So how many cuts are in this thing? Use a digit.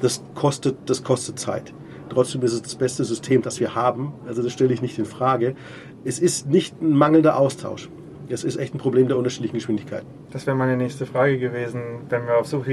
0